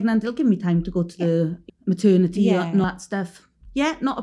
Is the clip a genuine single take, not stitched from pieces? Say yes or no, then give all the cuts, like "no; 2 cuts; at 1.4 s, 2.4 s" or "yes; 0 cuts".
no; 2 cuts; at 1.7 s, 2.8 s